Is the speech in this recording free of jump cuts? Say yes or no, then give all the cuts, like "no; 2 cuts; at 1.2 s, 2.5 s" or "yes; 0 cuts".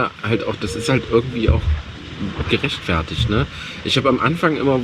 yes; 0 cuts